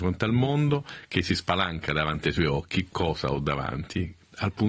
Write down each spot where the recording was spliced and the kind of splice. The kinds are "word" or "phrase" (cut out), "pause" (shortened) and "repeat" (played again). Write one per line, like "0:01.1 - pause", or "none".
none